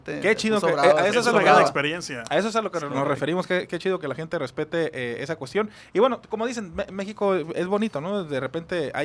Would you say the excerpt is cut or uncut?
uncut